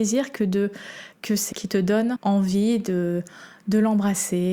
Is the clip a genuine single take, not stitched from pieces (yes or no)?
no